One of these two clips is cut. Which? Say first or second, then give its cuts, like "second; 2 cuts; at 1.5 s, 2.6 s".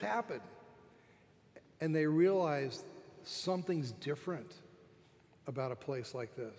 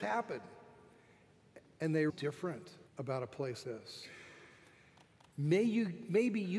second; 3 cuts; at 2.1 s, 2.9 s, 3.6 s